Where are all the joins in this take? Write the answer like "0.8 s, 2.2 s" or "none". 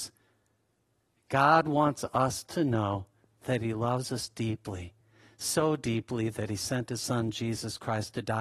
none